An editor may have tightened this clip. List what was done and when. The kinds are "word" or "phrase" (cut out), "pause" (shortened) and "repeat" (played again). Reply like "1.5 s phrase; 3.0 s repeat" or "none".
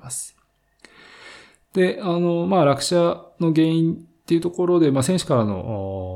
none